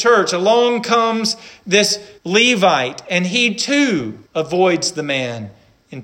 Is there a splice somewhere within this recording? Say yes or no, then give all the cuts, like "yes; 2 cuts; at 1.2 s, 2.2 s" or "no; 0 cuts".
yes; 2 cuts; at 2.2 s, 4.3 s